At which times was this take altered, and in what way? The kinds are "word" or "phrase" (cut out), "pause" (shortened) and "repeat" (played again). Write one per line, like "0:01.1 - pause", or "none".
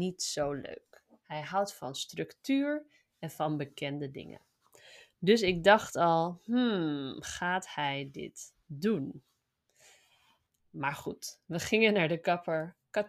none